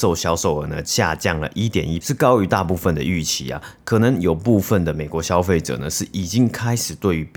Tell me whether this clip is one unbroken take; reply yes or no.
no